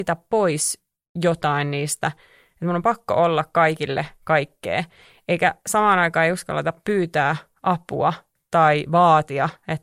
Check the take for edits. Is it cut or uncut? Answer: uncut